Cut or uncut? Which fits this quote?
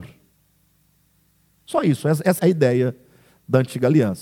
cut